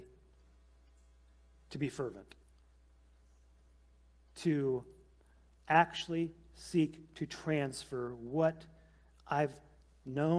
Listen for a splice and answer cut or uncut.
uncut